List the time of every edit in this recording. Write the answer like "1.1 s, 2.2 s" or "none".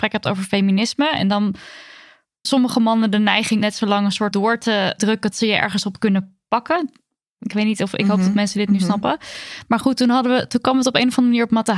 2.4 s, 3.6 s, 4.3 s, 5.0 s, 5.3 s